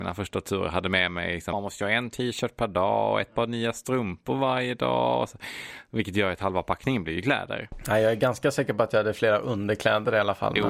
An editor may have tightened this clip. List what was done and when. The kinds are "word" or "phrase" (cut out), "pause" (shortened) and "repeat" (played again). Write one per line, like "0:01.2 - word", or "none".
0:01.5 - word